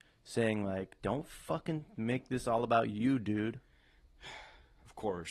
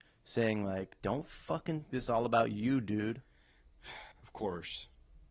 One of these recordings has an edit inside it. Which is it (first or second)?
second